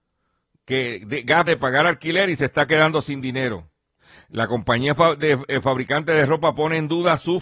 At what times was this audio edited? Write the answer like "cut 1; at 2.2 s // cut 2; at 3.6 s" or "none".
cut 1; at 1.5 s // cut 2; at 4.0 s